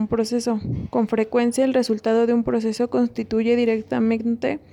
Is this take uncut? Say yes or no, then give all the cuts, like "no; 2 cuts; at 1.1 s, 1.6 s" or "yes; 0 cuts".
yes; 0 cuts